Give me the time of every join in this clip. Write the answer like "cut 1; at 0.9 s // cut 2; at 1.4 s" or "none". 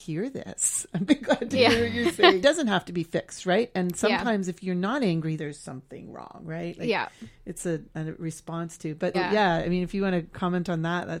cut 1; at 1.1 s // cut 2; at 2.4 s // cut 3; at 5.4 s // cut 4; at 7.9 s // cut 5; at 9.1 s